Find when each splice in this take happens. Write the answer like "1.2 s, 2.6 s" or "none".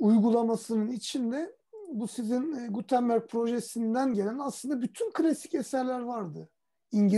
none